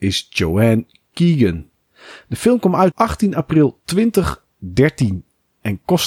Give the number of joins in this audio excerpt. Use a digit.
1